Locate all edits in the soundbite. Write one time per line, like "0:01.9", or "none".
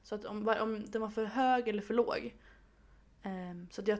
none